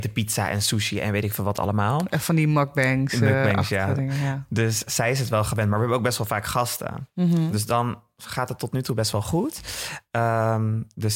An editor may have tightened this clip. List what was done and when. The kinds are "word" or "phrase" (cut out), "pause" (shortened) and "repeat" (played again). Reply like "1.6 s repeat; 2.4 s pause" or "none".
4.9 s word